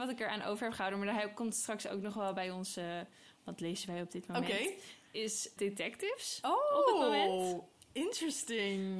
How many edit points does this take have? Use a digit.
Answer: 1